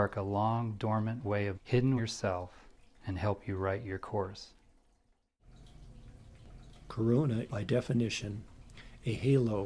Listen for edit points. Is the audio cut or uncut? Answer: cut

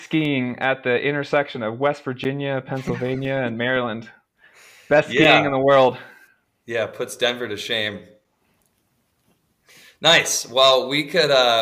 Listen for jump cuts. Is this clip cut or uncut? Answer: uncut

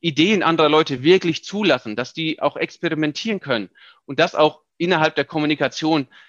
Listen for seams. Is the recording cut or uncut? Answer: uncut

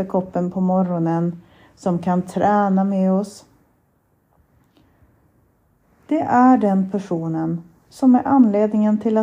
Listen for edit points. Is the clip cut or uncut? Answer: uncut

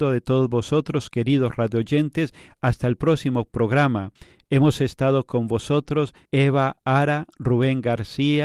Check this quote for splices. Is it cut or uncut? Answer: uncut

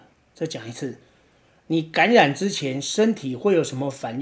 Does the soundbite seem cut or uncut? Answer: uncut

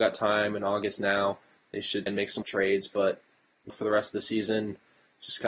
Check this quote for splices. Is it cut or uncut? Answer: cut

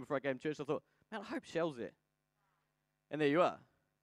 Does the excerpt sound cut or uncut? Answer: uncut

